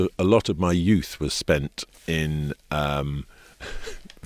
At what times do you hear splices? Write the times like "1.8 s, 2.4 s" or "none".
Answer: none

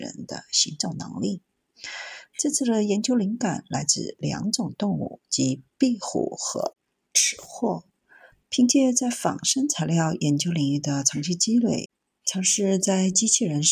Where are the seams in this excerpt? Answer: none

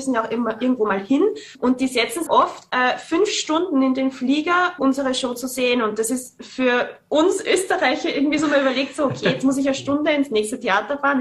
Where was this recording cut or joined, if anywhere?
1.5 s, 2.3 s, 4.8 s

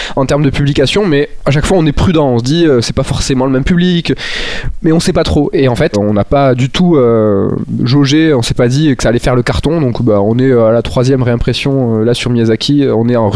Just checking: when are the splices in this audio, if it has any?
5.9 s

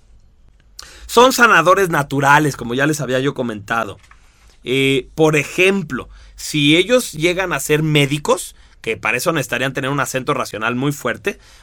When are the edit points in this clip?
none

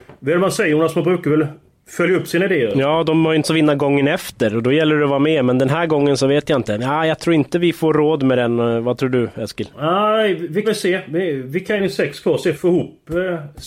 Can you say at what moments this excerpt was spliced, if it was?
3.4 s, 9.7 s, 10.6 s, 11.8 s, 12.5 s

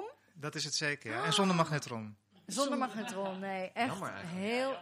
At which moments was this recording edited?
2.2 s

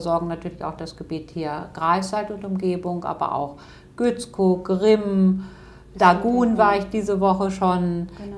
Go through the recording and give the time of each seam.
5.9 s

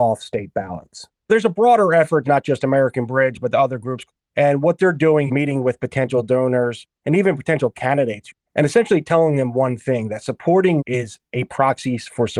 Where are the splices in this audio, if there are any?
1.2 s, 2.2 s, 4.2 s, 5.3 s, 6.9 s, 10.8 s

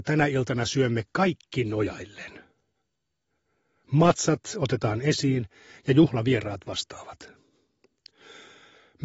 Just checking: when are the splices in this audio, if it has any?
none

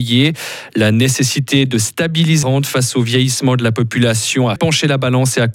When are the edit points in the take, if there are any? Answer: 2.4 s, 4.6 s

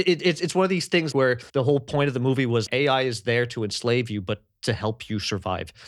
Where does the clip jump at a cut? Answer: 1.1 s, 1.5 s, 2.7 s

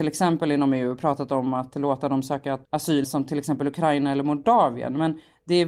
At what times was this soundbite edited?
2.6 s, 3.0 s

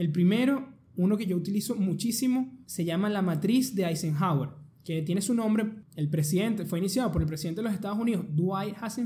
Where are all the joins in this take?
2.6 s

